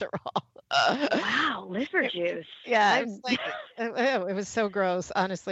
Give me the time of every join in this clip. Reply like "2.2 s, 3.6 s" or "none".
none